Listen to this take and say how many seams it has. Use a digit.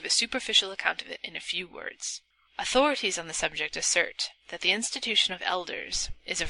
0